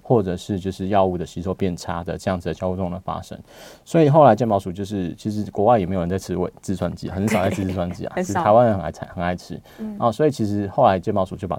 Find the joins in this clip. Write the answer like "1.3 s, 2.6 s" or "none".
none